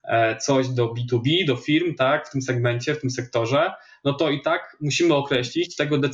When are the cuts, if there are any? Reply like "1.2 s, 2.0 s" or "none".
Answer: none